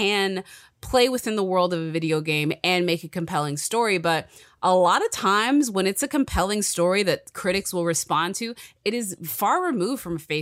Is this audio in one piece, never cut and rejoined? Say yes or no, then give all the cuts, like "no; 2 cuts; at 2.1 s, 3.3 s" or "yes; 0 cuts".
yes; 0 cuts